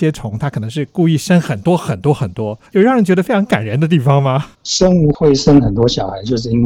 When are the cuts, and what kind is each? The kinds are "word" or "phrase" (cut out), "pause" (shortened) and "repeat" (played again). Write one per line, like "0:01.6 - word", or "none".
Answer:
0:02.7 - pause
0:04.5 - pause